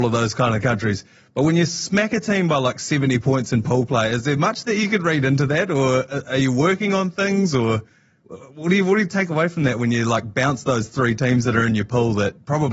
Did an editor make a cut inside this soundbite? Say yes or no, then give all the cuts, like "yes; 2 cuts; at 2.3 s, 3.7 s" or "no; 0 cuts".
no; 0 cuts